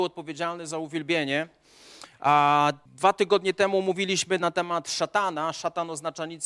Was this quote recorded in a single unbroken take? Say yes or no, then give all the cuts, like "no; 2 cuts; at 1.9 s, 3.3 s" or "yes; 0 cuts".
no; 1 cut; at 2.9 s